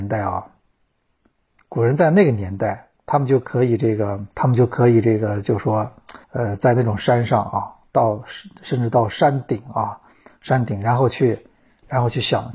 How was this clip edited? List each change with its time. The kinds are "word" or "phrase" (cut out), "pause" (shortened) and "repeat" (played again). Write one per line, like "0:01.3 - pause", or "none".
0:03.0 - pause
0:04.3 - pause
0:06.2 - pause